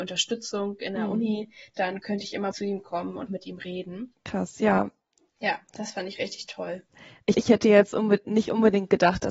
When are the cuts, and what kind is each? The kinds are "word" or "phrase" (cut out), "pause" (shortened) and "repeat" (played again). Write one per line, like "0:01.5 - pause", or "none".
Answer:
0:02.5 - word
0:03.3 - word
0:07.3 - word